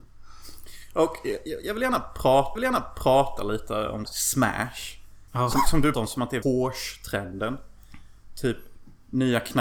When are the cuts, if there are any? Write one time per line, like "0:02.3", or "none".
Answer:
0:02.6
0:04.1
0:05.3
0:05.9
0:06.4